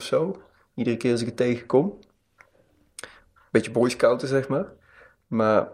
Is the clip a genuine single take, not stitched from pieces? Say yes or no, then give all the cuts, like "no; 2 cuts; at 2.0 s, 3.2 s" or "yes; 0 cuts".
yes; 0 cuts